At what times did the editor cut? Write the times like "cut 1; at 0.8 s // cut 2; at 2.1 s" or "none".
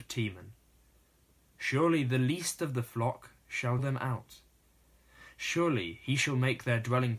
cut 1; at 3.8 s